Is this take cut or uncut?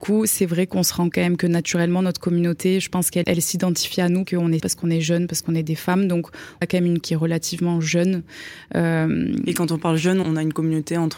cut